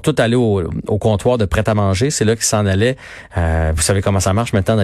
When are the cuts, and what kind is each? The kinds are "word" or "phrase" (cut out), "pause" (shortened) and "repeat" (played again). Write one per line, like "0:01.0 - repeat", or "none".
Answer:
none